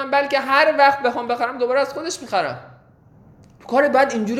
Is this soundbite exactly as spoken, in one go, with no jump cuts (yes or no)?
yes